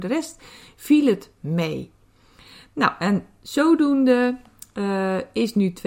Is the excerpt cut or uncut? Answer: uncut